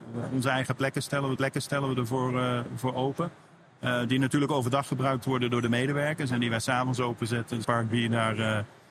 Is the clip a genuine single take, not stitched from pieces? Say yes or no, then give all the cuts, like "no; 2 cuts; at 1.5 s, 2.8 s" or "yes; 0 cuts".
no; 2 cuts; at 1.4 s, 7.6 s